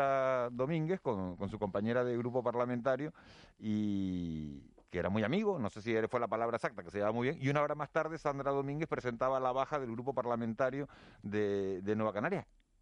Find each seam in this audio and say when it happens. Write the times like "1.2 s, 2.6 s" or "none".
none